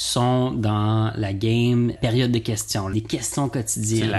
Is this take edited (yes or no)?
yes